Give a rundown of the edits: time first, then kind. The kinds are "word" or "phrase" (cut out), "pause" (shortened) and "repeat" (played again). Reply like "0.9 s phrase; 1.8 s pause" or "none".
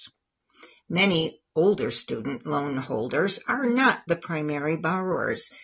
none